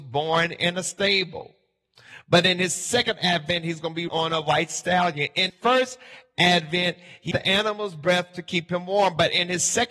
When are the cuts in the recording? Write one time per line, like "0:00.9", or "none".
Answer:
0:04.1
0:05.5
0:07.3